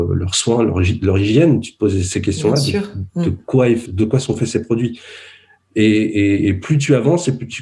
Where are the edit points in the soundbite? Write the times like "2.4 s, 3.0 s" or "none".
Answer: 3.9 s